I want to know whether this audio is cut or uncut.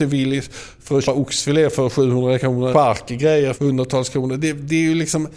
cut